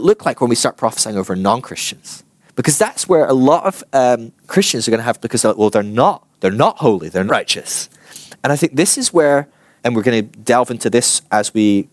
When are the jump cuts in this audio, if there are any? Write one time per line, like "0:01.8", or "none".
0:02.4
0:04.4
0:05.2
0:06.3
0:07.3
0:09.8